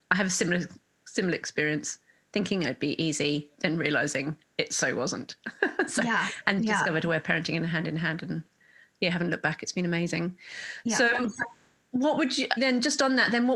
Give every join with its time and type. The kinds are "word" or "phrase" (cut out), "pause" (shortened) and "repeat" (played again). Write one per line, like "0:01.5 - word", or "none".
0:06.6 - word
0:12.6 - word